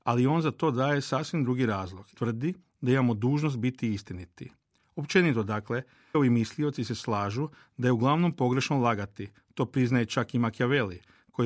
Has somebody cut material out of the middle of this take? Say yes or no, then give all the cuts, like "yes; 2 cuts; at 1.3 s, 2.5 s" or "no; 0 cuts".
yes; 2 cuts; at 2.1 s, 6.1 s